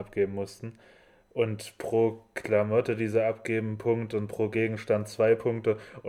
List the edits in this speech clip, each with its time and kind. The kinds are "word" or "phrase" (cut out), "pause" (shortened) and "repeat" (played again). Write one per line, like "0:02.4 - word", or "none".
none